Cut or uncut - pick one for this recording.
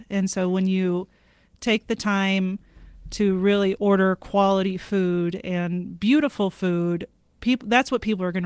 uncut